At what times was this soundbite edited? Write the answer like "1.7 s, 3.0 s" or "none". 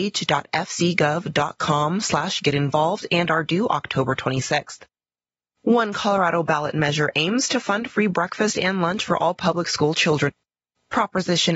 none